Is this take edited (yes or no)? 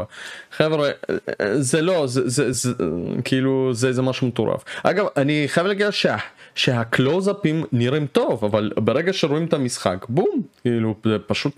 yes